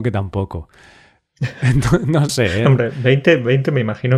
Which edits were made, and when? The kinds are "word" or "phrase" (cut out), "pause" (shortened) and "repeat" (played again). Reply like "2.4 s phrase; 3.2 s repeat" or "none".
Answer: 2.3 s word